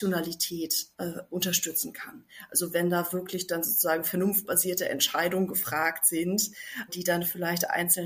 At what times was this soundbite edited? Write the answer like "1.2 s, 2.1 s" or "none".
0.9 s, 6.9 s

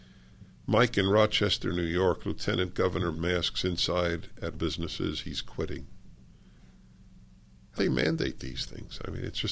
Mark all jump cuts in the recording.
3.1 s, 4.5 s, 7.8 s

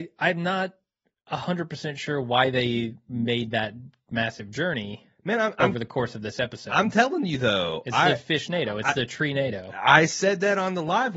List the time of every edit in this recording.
none

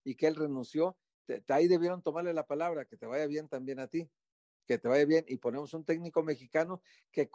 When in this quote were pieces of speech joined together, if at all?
none

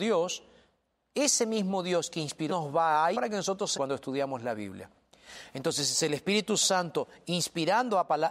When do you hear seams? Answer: 2.5 s, 3.1 s, 3.7 s

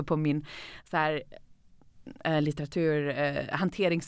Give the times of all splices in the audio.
none

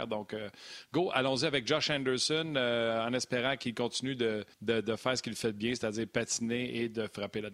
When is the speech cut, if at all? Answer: 4.5 s

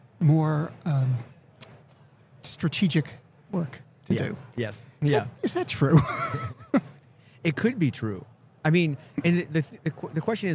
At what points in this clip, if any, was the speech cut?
none

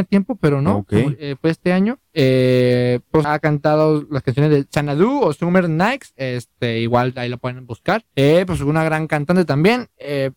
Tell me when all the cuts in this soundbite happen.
2.1 s, 3.2 s, 8.1 s

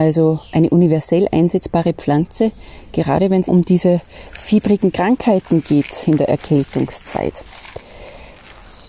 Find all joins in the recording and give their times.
3.5 s

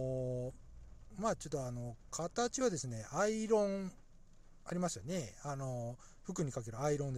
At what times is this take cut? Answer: none

